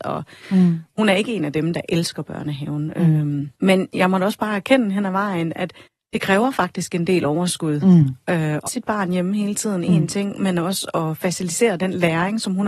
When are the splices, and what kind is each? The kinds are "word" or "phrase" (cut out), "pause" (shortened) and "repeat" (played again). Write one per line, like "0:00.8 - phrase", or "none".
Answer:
0:03.6 - pause
0:05.9 - pause
0:08.7 - word